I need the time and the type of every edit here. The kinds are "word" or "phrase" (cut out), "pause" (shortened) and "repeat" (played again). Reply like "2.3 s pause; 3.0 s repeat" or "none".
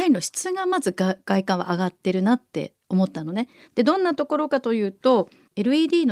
none